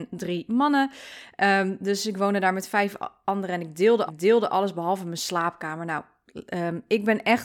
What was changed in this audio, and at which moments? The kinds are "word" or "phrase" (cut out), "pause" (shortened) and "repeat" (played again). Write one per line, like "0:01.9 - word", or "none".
0:04.1 - repeat